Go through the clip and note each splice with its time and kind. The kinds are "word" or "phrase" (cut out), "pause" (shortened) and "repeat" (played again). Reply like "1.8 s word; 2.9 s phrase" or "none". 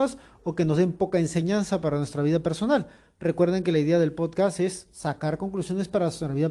none